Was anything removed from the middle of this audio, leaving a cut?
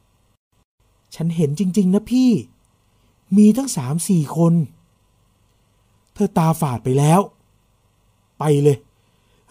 no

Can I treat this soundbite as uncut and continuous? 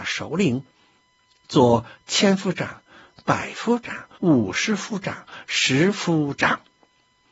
no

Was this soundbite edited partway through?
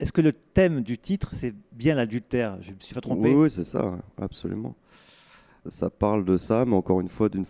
no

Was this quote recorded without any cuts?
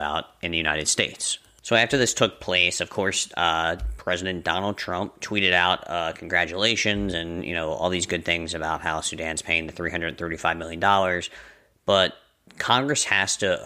yes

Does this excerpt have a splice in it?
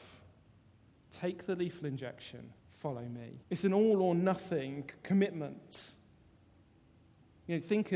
yes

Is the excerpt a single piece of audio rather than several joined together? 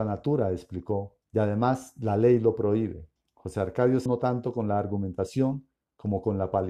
no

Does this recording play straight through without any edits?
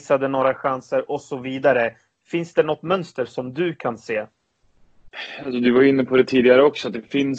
yes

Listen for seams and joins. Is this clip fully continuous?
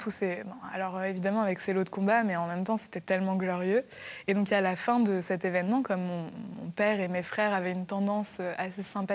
yes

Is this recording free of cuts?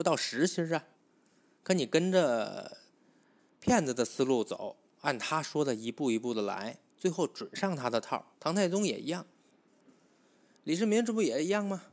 no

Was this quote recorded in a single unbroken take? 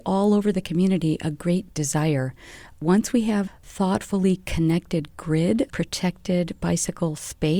no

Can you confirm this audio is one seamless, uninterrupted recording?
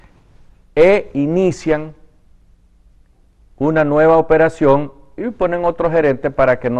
yes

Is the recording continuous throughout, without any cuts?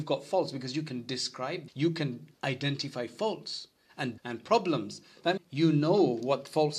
no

